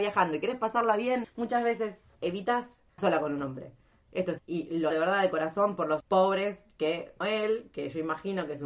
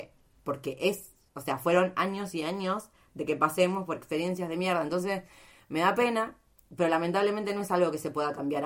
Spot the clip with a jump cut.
first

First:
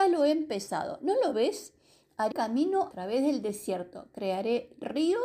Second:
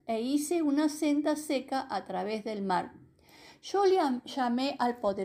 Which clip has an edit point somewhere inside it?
first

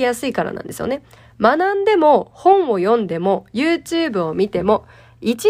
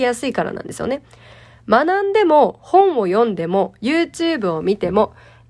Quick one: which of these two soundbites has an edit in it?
first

